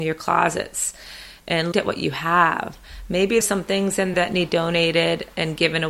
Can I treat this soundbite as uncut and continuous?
no; 4 cuts; at 1.7 s, 3.4 s, 4.1 s, 4.5 s

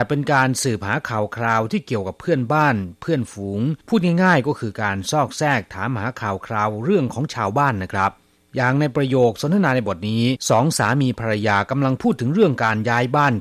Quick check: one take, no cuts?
no; 3 cuts; at 3.8 s, 8.4 s, 10.4 s

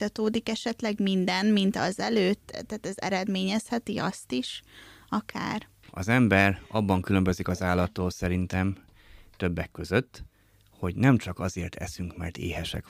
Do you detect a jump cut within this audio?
no; 0 cuts

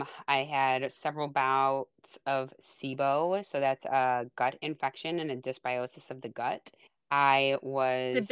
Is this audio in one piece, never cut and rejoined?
no; 1 cut; at 6.9 s

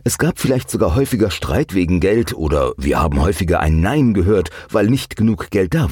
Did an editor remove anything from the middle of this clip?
no; 0 cuts

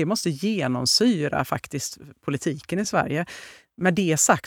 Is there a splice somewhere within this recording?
no; 0 cuts

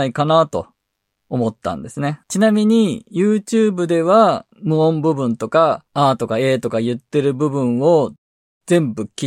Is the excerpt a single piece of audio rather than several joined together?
no; 3 cuts; at 2.2 s, 4.5 s, 5.9 s

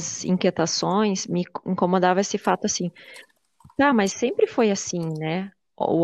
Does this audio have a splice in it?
no; 0 cuts

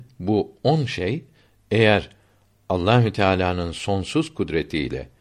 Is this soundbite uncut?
yes; 0 cuts

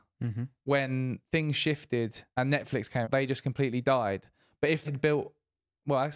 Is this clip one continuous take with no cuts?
no; 4 cuts; at 1.2 s, 2.3 s, 3.0 s, 4.8 s

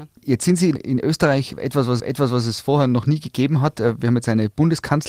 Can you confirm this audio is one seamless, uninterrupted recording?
no; 1 cut; at 2.0 s

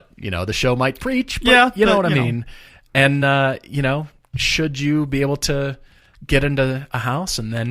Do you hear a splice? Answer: no; 0 cuts

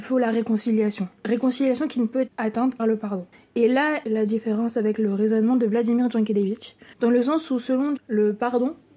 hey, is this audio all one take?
no; 6 cuts; at 2.3 s, 2.8 s, 3.3 s, 4.0 s, 6.9 s, 8.0 s

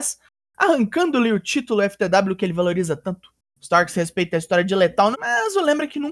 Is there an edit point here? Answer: yes; 2 cuts; at 3.4 s, 5.1 s

